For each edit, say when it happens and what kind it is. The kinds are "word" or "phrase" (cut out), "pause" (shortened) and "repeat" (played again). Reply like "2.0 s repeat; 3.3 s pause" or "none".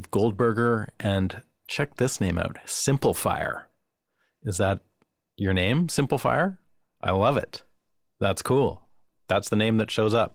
none

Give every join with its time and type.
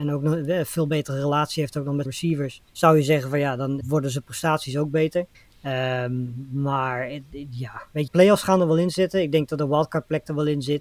2.0 s word; 2.7 s pause; 3.8 s word; 5.3 s pause; 8.1 s phrase

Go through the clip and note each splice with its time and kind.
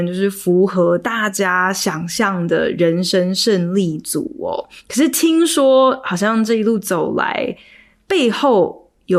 4.8 s pause

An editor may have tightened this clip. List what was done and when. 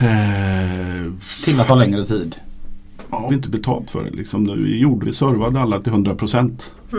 1.7 s word; 3.3 s phrase; 5.0 s word; 5.8 s word

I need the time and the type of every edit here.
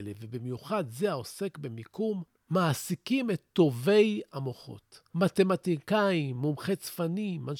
none

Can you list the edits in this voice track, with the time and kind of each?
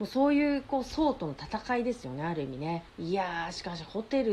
2.9 s pause

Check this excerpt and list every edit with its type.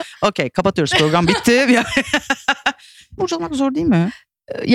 3.2 s word

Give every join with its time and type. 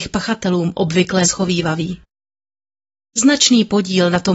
1.2 s word

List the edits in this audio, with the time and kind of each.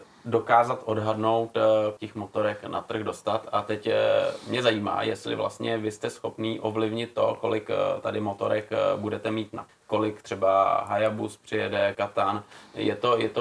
2.0 s word; 9.7 s word; 11.9 s word

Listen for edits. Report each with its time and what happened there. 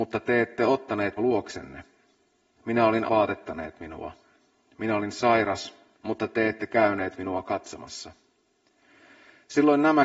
1.2 s word; 3.1 s phrase; 5.9 s phrase

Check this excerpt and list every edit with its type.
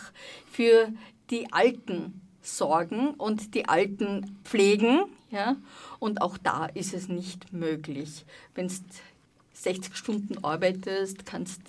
none

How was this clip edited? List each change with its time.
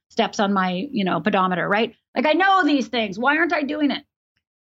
none

